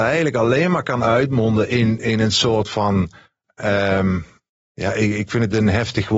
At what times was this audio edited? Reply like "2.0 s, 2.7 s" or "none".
4.5 s